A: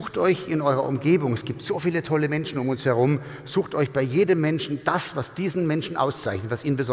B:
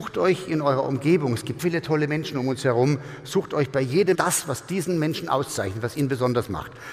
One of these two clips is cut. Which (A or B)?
B